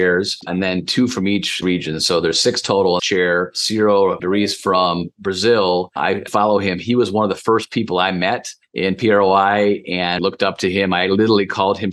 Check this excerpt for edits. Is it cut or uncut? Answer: cut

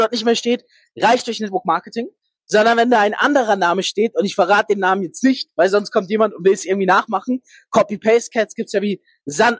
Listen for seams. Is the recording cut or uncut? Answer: uncut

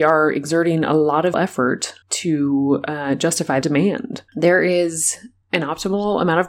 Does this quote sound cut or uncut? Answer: cut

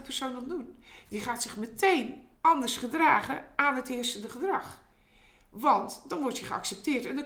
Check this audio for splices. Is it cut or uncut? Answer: cut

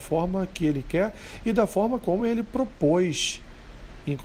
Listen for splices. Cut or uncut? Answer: uncut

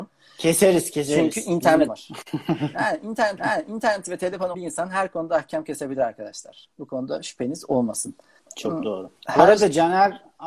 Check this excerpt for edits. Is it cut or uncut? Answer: cut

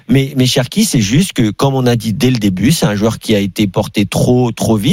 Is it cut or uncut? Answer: uncut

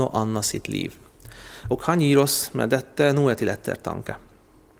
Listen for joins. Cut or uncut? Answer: uncut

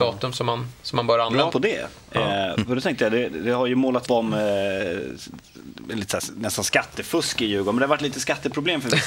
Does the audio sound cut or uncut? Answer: cut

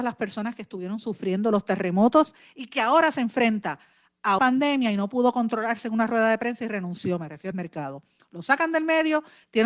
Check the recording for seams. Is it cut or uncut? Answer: cut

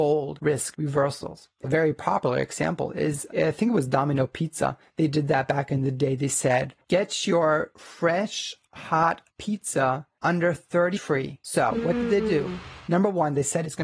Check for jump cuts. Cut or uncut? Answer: cut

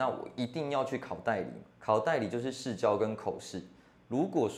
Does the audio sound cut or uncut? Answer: cut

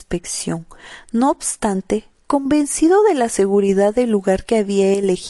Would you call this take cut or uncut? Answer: uncut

